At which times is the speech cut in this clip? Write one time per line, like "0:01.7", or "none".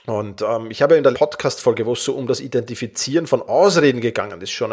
0:01.1